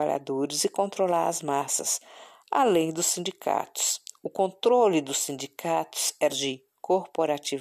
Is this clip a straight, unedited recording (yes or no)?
no